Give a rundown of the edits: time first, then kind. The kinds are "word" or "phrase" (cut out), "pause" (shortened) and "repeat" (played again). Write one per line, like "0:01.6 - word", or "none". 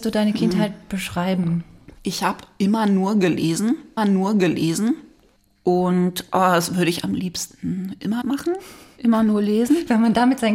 0:02.0 - pause
0:04.0 - repeat
0:07.0 - word
0:08.2 - word